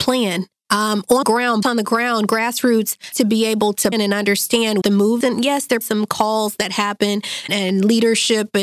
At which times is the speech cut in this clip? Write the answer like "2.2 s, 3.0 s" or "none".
1.2 s, 1.6 s, 3.1 s, 3.9 s, 4.8 s, 5.2 s, 5.8 s, 7.5 s